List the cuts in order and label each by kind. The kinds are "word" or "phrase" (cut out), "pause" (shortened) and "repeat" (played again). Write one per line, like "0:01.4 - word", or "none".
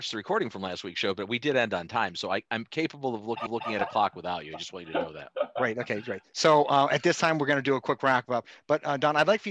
0:03.5 - repeat